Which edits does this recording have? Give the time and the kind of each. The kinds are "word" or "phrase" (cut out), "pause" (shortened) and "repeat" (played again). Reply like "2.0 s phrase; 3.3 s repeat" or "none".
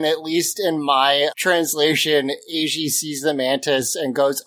1.3 s word